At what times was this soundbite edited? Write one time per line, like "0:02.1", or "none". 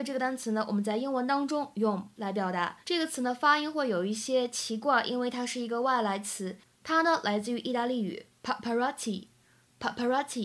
0:02.1
0:02.8
0:08.3